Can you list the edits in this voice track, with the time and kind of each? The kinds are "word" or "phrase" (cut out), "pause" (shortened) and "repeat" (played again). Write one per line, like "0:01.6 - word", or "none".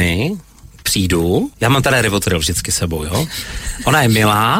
0:01.5 - pause